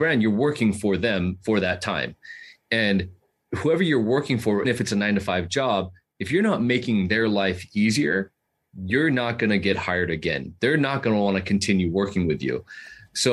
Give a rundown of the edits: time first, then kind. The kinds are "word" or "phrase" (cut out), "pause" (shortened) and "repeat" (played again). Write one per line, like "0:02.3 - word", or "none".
0:04.6 - word